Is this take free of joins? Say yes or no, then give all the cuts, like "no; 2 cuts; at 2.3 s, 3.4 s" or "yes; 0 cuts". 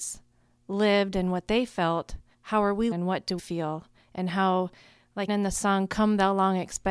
no; 4 cuts; at 2.3 s, 2.9 s, 3.4 s, 5.3 s